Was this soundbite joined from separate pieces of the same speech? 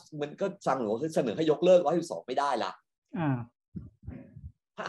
no; 0 cuts

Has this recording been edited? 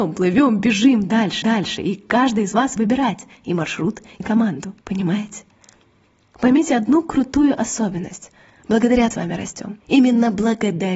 yes; 6 cuts; at 1.4 s, 2.8 s, 4.2 s, 4.8 s, 9.1 s, 9.8 s

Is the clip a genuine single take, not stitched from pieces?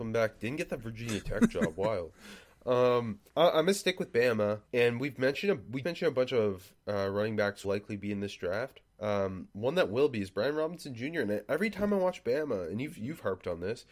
no; 6 cuts; at 3.3 s, 4.7 s, 5.8 s, 6.8 s, 7.6 s, 8.9 s

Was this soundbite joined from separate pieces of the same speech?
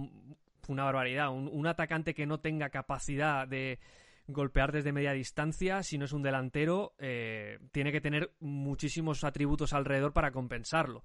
yes; 1 cut; at 7.7 s

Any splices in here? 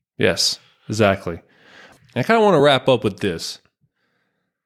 no; 0 cuts

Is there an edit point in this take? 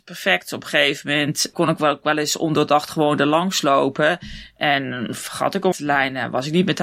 yes; 2 cuts; at 1.5 s, 5.7 s

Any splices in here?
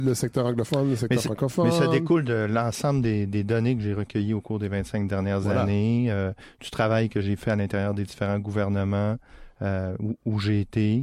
no; 0 cuts

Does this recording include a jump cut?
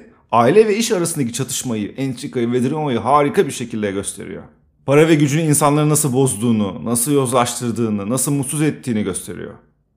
no; 0 cuts

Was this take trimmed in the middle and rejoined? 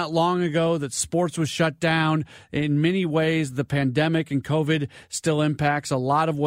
no; 0 cuts

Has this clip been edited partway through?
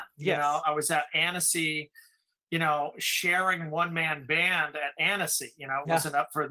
no; 0 cuts

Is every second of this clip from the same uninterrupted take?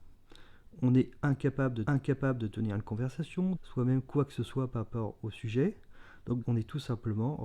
no; 3 cuts; at 1.9 s, 3.6 s, 6.4 s

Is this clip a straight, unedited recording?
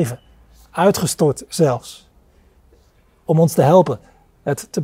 yes; 0 cuts

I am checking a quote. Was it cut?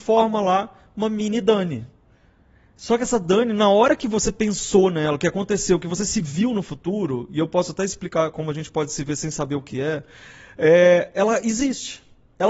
no; 0 cuts

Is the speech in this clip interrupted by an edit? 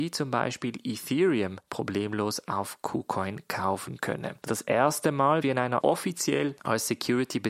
yes; 4 cuts; at 1.6 s, 4.5 s, 5.4 s, 5.8 s

